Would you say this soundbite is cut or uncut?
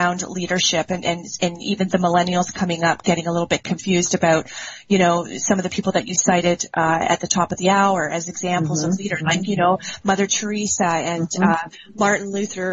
uncut